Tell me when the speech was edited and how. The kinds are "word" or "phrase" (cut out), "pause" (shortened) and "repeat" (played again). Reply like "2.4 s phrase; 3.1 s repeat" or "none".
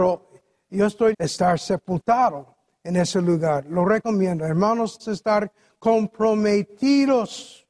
1.1 s word; 5.0 s word

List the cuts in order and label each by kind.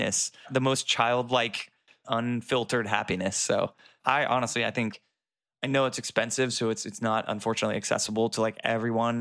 none

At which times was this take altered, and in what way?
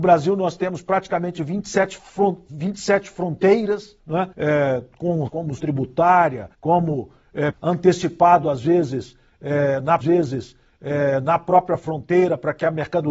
4.0 s pause; 4.3 s pause; 5.3 s phrase; 5.6 s word; 6.5 s pause; 7.5 s word; 10.0 s repeat

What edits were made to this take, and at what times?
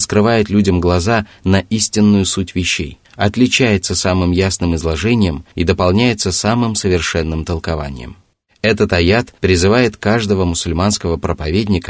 3.0 s pause; 5.5 s pause; 8.3 s pause; 9.4 s pause

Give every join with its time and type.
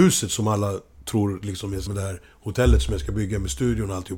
1.9 s word

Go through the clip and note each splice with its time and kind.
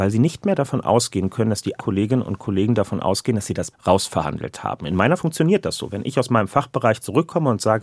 1.8 s word; 3.7 s word; 5.2 s word

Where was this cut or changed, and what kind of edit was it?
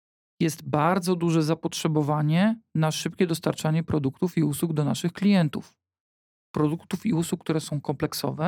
none

